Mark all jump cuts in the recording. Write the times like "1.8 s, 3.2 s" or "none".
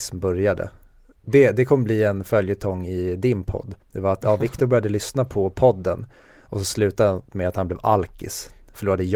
3.8 s